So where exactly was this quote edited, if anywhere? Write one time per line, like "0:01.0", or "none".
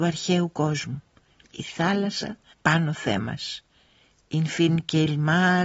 0:02.5